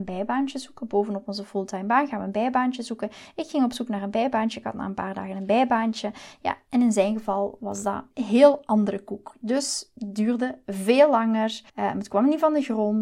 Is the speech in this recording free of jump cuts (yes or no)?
no